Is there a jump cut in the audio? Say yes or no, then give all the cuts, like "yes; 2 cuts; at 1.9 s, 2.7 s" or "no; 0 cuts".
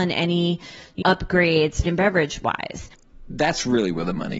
yes; 2 cuts; at 1.0 s, 1.8 s